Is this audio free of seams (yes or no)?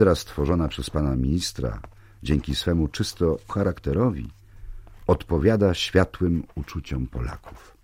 no